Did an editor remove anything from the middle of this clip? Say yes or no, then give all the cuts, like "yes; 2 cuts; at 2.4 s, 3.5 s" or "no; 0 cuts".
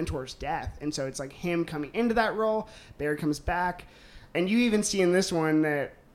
no; 0 cuts